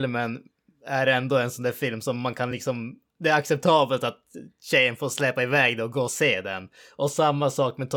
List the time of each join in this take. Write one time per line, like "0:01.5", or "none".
none